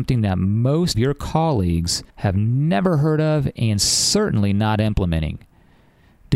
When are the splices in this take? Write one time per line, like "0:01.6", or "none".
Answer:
0:00.9
0:02.1